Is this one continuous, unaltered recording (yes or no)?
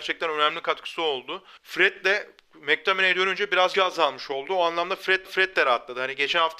no